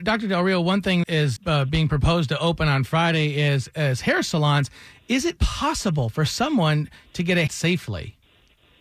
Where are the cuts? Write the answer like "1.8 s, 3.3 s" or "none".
1.0 s, 1.4 s, 5.4 s, 7.5 s